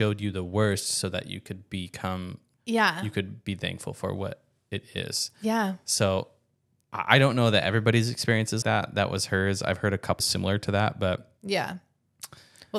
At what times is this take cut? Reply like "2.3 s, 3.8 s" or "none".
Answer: 2.5 s, 8.6 s, 10.2 s